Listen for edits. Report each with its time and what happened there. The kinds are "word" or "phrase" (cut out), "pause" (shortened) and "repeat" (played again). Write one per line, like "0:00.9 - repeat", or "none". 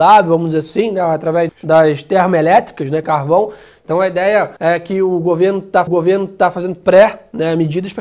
0:01.5 - word
0:03.0 - word
0:04.6 - pause
0:05.9 - repeat